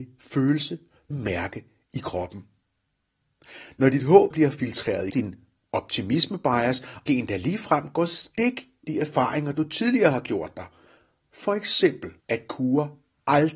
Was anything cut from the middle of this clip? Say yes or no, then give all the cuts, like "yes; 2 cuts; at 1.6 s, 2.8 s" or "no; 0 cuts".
yes; 6 cuts; at 1.1 s, 4.3 s, 5.1 s, 7.1 s, 8.8 s, 12.2 s